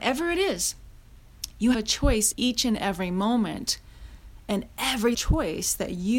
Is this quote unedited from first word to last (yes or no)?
no